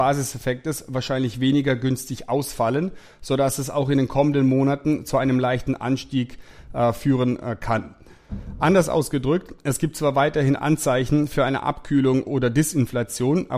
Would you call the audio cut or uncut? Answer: uncut